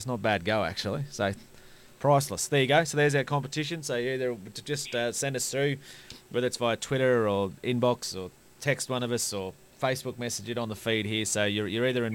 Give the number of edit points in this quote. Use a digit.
0